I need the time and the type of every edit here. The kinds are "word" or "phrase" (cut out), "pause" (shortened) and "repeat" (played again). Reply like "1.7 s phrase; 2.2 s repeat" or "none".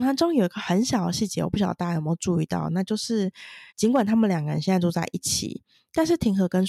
3.7 s pause